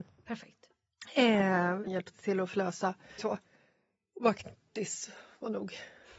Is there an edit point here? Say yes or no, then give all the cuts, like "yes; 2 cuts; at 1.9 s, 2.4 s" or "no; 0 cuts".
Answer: yes; 2 cuts; at 1.9 s, 3.2 s